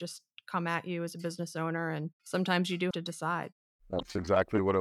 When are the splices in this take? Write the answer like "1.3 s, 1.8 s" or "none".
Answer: 2.9 s